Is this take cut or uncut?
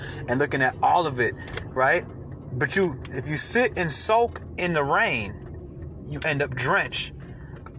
uncut